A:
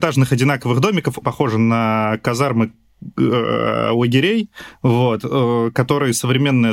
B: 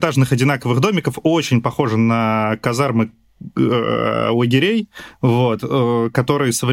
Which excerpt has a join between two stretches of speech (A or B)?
A